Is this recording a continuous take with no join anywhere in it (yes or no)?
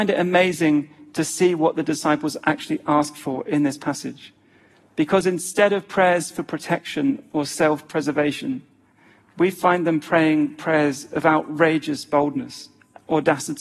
yes